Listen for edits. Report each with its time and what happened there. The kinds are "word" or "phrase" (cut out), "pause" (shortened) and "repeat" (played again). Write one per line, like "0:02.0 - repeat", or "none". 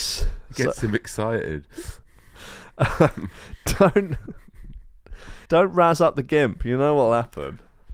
0:05.5 - pause